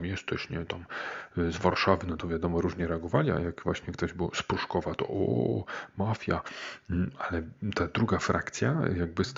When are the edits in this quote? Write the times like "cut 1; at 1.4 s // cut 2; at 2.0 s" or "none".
none